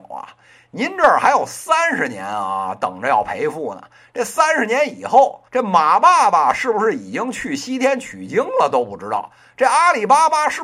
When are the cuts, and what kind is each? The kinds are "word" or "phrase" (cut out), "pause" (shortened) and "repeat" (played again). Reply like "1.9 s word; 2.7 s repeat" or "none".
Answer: 5.5 s pause